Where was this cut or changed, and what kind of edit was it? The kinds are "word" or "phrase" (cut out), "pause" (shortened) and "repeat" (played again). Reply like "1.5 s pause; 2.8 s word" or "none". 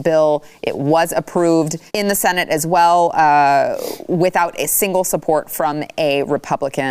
1.9 s pause